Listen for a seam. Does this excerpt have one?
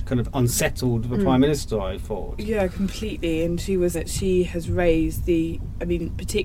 yes; 1 cut; at 3.9 s

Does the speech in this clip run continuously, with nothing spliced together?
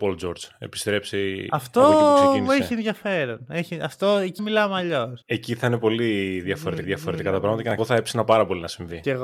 no; 4 cuts; at 4.4 s, 5.2 s, 6.8 s, 7.8 s

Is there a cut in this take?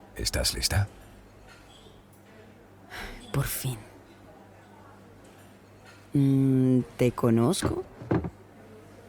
no; 0 cuts

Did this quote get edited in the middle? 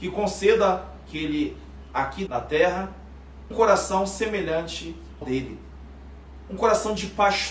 yes; 4 cuts; at 1.1 s, 2.3 s, 3.5 s, 5.2 s

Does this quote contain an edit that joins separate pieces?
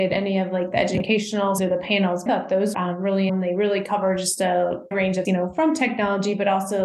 yes; 6 cuts; at 1.6 s, 2.3 s, 2.7 s, 3.3 s, 4.9 s, 5.2 s

